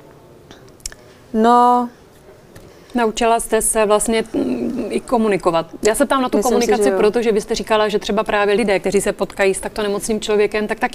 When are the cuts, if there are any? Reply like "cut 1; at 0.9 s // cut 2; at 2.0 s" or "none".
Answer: cut 1; at 2.7 s